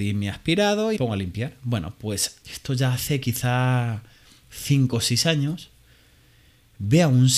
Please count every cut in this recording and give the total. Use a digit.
2